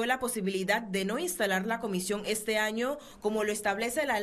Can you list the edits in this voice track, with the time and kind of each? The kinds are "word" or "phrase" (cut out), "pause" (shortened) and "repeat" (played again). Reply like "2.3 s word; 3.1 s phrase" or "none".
none